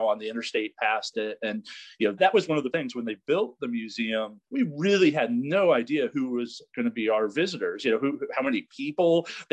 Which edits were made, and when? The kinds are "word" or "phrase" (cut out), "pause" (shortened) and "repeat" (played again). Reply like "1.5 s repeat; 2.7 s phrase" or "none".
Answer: 2.2 s word; 2.7 s word; 4.4 s pause